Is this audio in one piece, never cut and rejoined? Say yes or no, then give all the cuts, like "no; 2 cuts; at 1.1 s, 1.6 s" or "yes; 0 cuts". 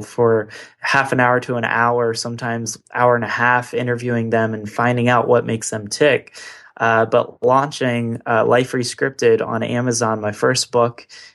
yes; 0 cuts